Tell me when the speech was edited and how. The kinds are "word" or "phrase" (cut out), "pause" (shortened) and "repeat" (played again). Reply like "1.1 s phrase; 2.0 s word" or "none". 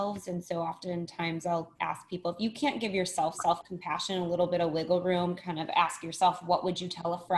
1.7 s pause; 3.3 s word